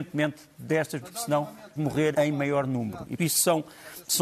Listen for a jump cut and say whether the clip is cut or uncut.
cut